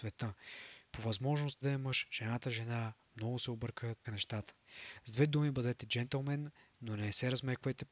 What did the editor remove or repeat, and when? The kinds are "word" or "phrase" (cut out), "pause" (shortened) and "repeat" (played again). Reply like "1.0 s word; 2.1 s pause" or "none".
1.6 s word; 4.0 s word